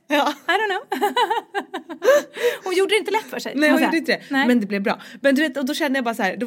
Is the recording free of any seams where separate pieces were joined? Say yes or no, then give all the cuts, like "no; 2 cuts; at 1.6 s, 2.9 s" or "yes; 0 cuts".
yes; 0 cuts